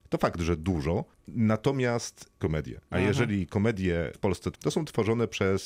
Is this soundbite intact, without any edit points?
no; 4 cuts; at 2.4 s, 2.9 s, 4.1 s, 4.5 s

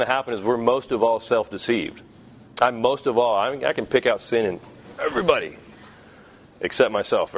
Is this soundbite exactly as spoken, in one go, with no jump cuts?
yes; 0 cuts

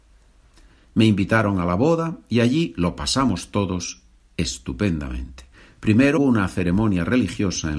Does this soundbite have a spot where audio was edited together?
yes; 1 cut; at 6.2 s

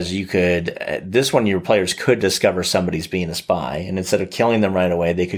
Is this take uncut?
yes; 0 cuts

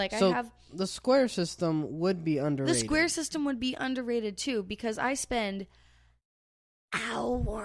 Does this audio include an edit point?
no; 0 cuts

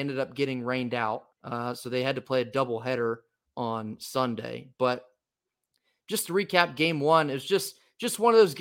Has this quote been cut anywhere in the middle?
yes; 1 cut; at 1.3 s

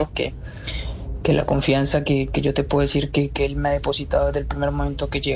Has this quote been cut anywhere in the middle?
no; 0 cuts

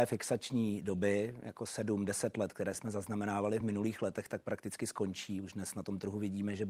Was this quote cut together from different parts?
no; 0 cuts

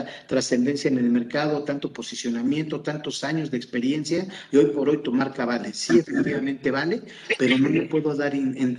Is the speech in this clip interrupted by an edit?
no; 0 cuts

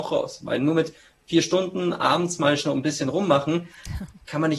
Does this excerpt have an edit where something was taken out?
no; 0 cuts

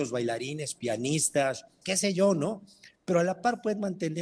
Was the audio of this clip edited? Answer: yes; 1 cut; at 1.8 s

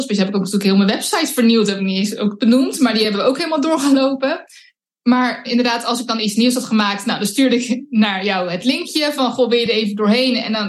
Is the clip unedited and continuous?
yes; 0 cuts

